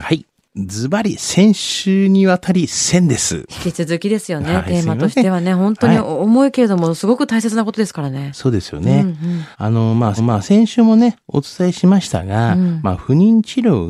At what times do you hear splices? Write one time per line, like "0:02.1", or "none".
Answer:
0:09.5
0:10.2